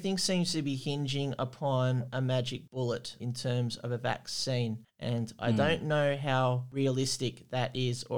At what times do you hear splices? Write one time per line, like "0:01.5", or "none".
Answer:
none